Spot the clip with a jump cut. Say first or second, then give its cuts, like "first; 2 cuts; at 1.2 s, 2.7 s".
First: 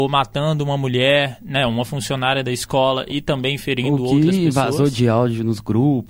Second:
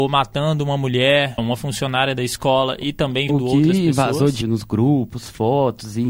second; 3 cuts; at 1.4 s, 3.3 s, 4.4 s